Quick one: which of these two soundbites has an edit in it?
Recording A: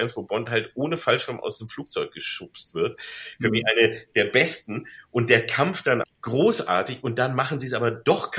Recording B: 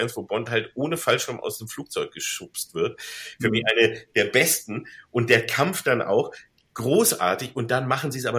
A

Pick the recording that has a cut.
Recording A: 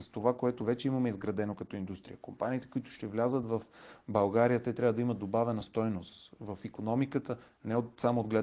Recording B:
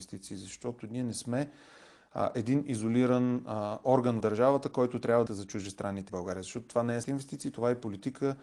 B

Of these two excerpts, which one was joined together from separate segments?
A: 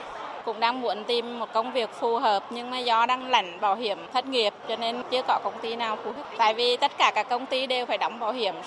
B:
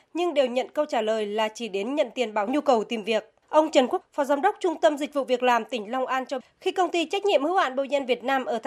B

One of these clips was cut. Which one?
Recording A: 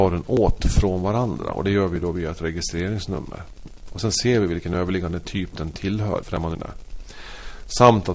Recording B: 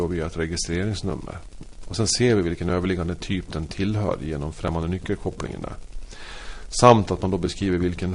A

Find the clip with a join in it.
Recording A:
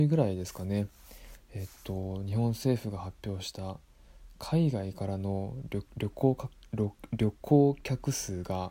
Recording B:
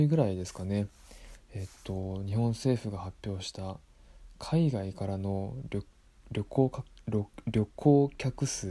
A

